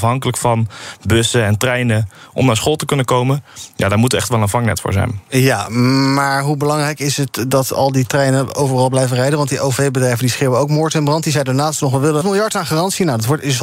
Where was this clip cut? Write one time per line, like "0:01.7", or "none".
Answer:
0:12.2